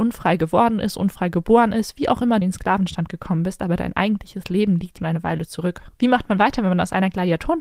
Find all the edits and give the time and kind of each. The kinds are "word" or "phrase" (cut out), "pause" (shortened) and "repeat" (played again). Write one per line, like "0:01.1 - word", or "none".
0:02.4 - word
0:05.0 - word